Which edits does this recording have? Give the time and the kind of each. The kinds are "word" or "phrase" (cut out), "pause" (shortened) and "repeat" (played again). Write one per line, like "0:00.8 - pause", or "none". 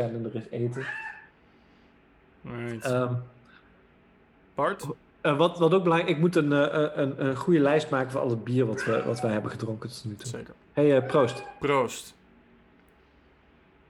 none